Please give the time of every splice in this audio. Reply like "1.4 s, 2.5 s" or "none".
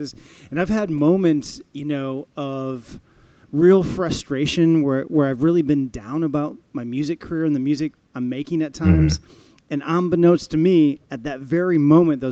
none